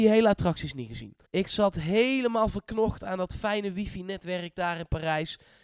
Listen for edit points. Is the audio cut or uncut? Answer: cut